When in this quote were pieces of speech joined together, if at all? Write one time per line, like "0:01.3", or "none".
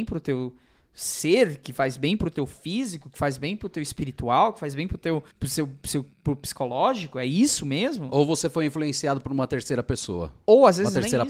0:05.3
0:06.1